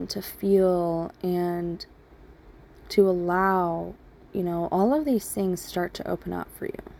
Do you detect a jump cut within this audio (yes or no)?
no